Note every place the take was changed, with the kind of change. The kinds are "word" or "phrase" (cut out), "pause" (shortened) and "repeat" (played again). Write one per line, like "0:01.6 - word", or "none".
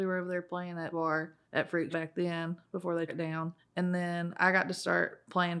0:00.9 - word
0:01.4 - pause
0:01.9 - word
0:03.1 - word
0:03.6 - pause